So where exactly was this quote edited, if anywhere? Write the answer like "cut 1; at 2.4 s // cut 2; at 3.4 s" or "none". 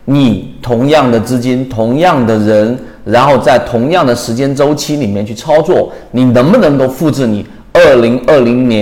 none